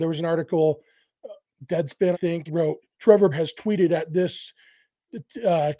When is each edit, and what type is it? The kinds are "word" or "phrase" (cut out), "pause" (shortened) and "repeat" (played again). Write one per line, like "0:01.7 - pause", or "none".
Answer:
0:02.1 - word
0:02.5 - word
0:03.3 - word